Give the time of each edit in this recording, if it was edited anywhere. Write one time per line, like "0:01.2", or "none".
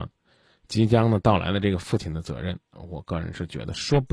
0:02.6